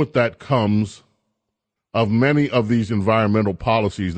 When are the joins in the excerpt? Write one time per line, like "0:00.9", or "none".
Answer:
0:01.8